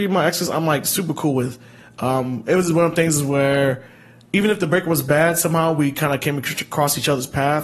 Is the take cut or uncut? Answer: uncut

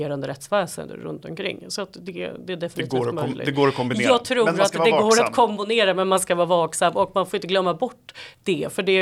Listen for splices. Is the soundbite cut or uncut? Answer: uncut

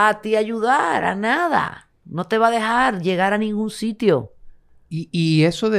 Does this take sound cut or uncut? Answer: uncut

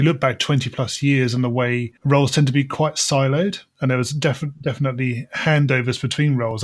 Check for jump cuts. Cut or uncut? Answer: cut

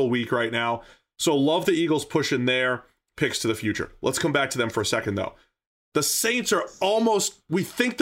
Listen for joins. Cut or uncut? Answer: uncut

